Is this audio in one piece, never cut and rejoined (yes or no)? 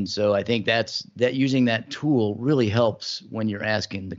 yes